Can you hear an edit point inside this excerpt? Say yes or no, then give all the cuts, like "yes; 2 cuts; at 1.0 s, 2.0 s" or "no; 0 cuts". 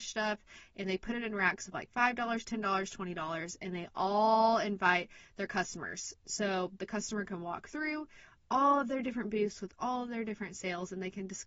no; 0 cuts